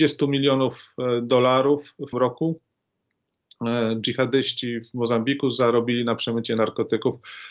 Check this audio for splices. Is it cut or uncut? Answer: cut